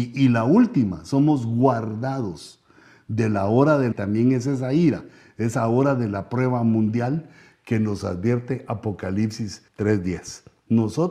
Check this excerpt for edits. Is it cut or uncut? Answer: cut